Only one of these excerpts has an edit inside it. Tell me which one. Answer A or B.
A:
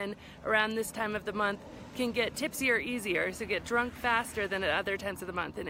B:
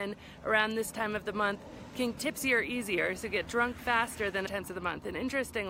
B